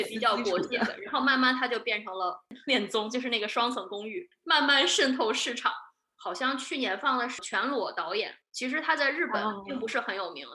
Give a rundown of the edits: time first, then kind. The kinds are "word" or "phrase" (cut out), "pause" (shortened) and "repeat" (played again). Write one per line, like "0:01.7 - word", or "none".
0:02.5 - pause
0:08.4 - pause